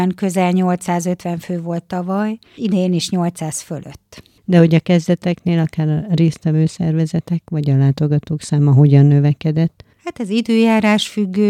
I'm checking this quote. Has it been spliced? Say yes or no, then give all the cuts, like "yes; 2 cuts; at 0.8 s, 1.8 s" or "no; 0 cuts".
yes; 2 cuts; at 2.6 s, 9.9 s